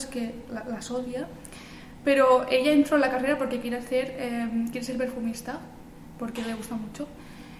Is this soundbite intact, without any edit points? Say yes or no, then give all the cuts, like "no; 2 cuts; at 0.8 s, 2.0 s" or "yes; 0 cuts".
yes; 0 cuts